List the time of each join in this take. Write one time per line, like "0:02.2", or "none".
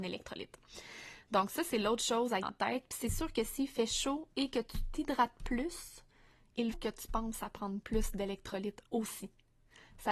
0:02.4
0:06.7
0:08.9

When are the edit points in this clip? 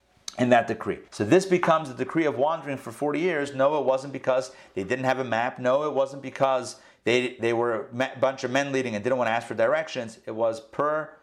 0:01.1

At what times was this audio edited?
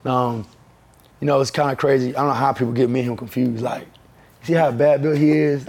none

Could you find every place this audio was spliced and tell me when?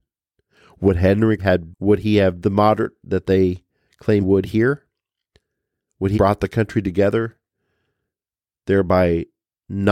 0:01.4
0:01.7
0:02.4
0:03.0
0:04.2
0:06.1

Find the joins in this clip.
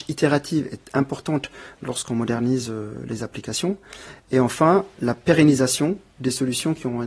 none

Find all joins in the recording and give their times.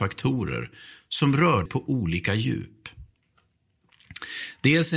0:01.7

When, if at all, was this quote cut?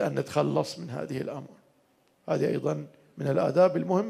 none

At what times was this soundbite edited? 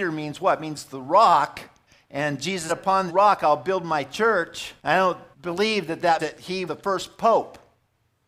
0:01.9
0:02.7
0:03.1
0:04.8
0:05.3
0:06.2
0:06.7

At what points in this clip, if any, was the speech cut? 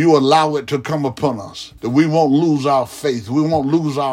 0:01.8

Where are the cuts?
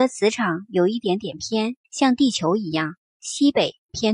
0:01.8

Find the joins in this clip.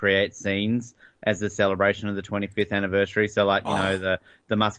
none

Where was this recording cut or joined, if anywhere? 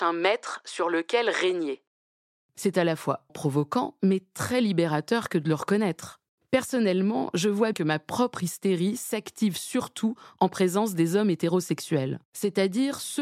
0:03.3
0:07.7

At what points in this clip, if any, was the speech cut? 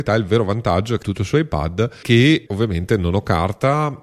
0:01.0
0:02.0
0:02.5

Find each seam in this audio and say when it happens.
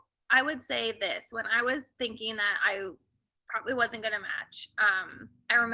none

